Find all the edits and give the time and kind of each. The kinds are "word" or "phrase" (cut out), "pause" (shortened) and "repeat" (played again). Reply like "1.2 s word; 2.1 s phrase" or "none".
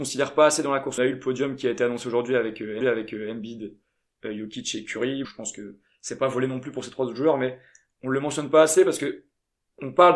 1.0 s phrase; 2.8 s repeat; 5.2 s word